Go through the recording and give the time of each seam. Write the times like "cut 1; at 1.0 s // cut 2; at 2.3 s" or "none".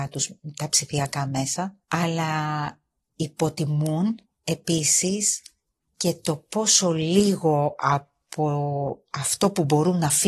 cut 1; at 1.8 s // cut 2; at 4.3 s